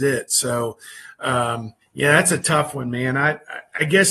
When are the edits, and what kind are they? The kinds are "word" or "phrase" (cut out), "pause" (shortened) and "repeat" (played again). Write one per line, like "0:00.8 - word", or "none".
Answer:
0:01.8 - pause